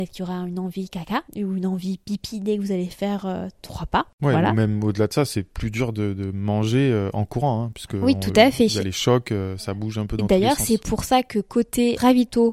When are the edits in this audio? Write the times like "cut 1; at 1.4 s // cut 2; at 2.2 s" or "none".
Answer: cut 1; at 1.3 s // cut 2; at 4.1 s